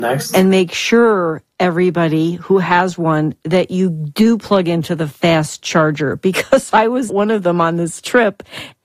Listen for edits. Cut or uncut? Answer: cut